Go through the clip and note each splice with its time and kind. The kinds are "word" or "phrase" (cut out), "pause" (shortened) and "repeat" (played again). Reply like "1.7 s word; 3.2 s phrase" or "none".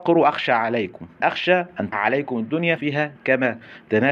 1.2 s word; 1.9 s word; 2.8 s word